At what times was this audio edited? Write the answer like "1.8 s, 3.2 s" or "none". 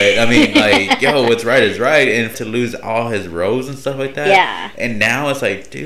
2.3 s